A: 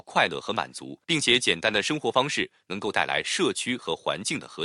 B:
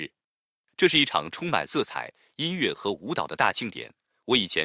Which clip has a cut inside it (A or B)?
A